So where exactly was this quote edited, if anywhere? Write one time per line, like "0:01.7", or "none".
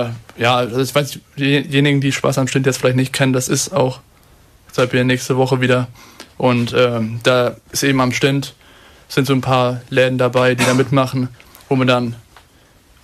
none